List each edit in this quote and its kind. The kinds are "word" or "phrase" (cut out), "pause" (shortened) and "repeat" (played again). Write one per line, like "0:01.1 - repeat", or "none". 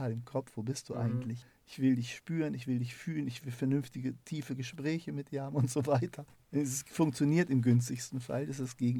none